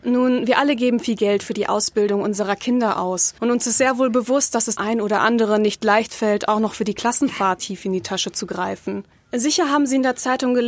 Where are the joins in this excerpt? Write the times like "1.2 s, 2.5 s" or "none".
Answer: 3.4 s, 4.8 s, 9.1 s